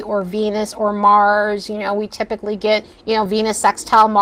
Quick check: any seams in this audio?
no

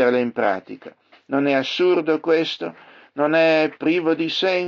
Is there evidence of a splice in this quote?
no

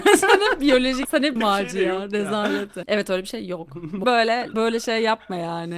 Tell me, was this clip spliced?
yes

